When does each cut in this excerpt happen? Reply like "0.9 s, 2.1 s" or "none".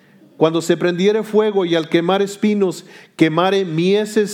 none